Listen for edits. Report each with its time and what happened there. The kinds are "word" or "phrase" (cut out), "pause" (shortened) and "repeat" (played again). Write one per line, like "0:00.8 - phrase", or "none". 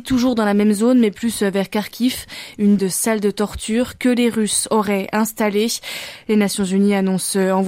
0:02.8 - word